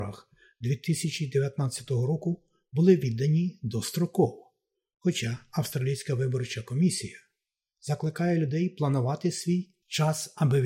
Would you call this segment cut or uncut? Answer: uncut